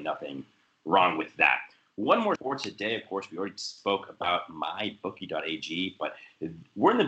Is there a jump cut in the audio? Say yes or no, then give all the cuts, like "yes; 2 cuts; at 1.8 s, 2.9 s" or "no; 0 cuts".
yes; 1 cut; at 2.4 s